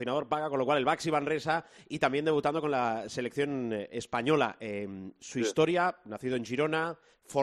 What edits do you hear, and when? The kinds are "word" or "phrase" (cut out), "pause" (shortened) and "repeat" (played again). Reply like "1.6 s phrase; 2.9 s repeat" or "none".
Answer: none